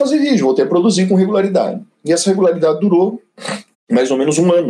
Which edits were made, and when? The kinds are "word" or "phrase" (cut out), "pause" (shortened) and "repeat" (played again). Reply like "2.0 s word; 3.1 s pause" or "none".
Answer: 3.7 s pause